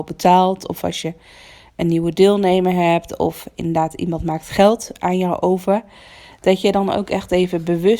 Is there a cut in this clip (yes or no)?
no